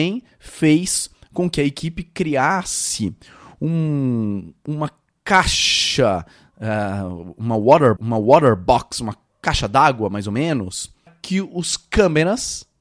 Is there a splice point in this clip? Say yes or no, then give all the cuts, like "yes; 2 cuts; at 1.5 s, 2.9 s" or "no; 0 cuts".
yes; 2 cuts; at 8.0 s, 11.1 s